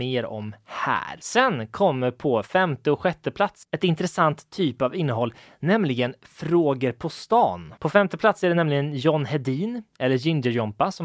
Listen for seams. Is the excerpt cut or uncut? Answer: uncut